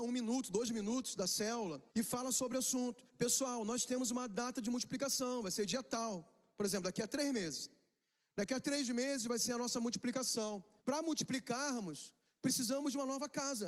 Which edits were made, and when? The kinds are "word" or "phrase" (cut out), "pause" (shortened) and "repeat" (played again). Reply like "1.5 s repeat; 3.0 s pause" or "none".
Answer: 1.9 s pause; 3.1 s pause; 10.8 s pause